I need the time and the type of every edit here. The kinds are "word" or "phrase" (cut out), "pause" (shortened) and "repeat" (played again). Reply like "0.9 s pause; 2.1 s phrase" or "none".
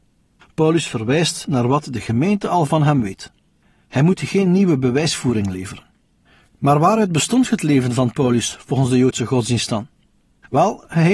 none